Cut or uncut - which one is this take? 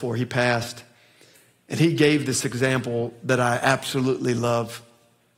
uncut